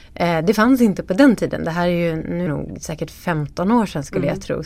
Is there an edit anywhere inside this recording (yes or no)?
yes